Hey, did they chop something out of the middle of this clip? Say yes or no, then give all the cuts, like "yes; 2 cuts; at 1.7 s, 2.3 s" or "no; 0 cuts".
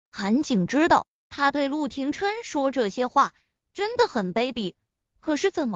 no; 0 cuts